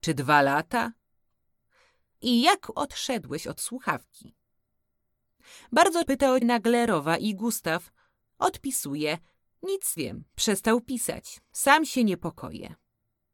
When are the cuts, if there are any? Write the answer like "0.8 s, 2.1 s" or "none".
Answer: 2.7 s, 6.1 s, 6.4 s, 10.0 s